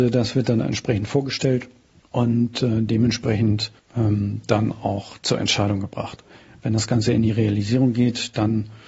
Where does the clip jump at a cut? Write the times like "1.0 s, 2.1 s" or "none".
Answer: none